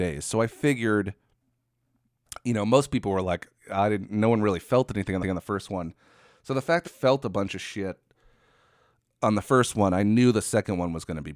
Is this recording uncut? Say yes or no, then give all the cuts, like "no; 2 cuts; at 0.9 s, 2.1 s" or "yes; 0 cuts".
no; 3 cuts; at 3.6 s, 5.2 s, 6.9 s